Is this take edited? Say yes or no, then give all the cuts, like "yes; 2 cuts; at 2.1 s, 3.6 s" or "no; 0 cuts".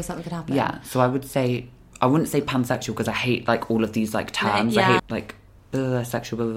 yes; 1 cut; at 5.0 s